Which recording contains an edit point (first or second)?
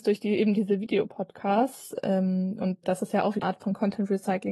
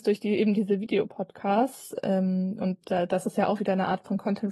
first